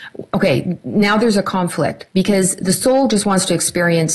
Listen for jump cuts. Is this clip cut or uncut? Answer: cut